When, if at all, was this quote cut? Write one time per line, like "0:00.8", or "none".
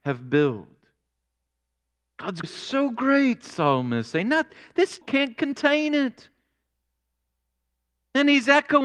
0:02.4
0:05.0

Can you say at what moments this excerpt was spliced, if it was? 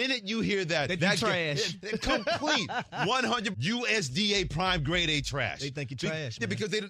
0:01.0
0:03.5

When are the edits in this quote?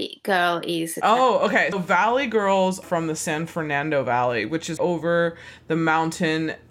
0:01.7
0:02.8
0:04.8

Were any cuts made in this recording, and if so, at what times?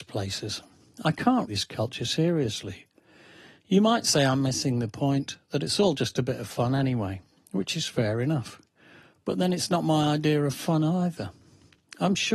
0:01.5

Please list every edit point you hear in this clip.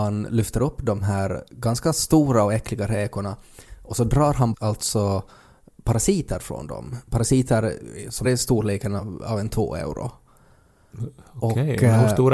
0:04.5
0:08.2

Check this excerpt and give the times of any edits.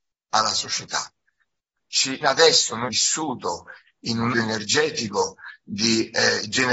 0:02.2
0:02.9
0:04.3

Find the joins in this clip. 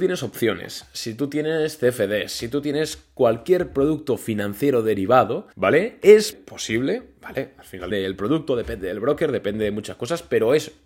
0:05.5
0:06.3
0:07.9

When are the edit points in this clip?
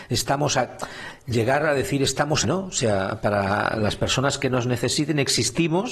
0:02.4

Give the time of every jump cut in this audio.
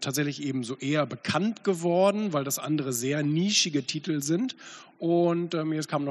none

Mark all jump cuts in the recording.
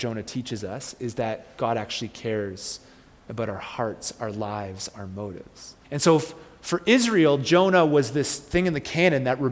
0:05.8

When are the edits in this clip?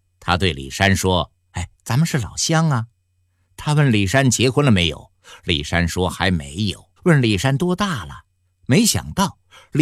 0:01.7
0:02.9
0:07.0

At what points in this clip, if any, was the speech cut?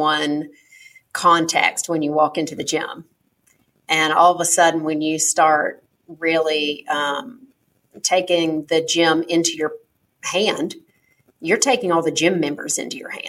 none

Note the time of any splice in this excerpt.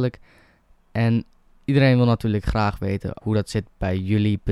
0:03.2

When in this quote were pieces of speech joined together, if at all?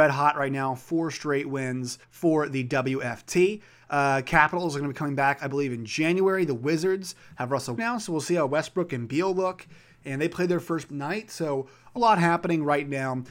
0:02.0
0:07.8
0:10.9
0:12.0

